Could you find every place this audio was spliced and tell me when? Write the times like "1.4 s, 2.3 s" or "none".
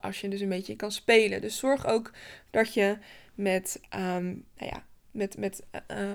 none